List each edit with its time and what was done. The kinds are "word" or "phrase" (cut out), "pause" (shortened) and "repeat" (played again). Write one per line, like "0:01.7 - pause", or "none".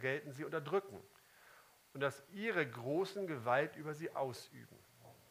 none